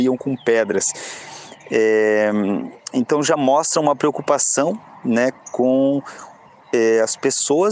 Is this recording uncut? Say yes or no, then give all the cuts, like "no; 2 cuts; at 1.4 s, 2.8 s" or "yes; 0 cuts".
yes; 0 cuts